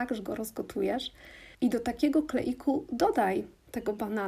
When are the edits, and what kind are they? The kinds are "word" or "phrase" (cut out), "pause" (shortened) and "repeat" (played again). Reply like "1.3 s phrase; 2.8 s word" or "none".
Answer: 1.5 s pause